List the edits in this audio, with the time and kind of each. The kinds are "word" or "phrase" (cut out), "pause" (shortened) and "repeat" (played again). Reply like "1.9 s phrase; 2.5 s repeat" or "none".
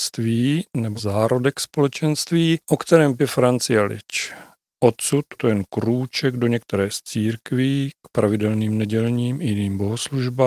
1.0 s word; 3.2 s word; 5.4 s phrase